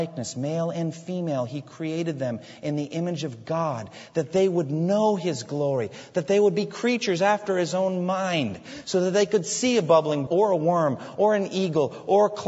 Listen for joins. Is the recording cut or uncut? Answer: cut